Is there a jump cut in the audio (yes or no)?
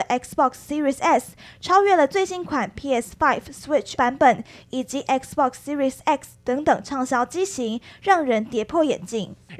yes